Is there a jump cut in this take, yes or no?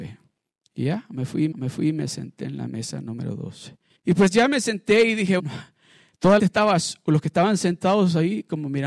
yes